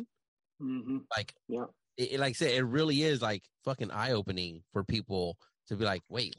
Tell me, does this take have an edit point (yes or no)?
no